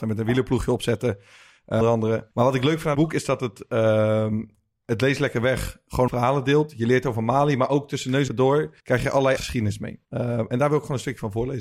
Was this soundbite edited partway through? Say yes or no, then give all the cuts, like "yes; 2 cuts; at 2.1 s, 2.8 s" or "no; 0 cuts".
yes; 8 cuts; at 1.8 s, 2.3 s, 2.9 s, 6.1 s, 8.3 s, 8.8 s, 9.4 s, 10.0 s